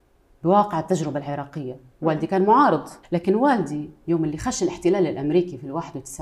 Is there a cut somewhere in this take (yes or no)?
yes